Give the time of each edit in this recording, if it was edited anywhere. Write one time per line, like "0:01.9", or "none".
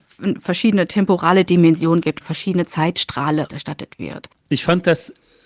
0:02.2
0:03.5